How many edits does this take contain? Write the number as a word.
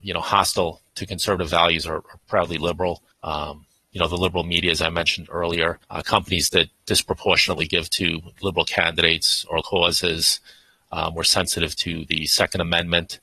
four